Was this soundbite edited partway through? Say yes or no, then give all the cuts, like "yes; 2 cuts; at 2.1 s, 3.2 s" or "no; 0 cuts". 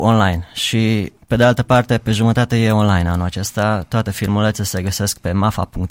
yes; 1 cut; at 1.2 s